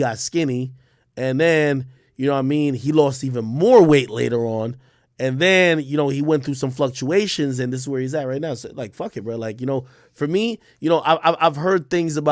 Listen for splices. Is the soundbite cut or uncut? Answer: uncut